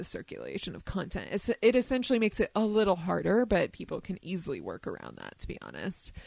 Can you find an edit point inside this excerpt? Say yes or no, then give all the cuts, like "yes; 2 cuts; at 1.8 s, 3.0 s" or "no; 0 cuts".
no; 0 cuts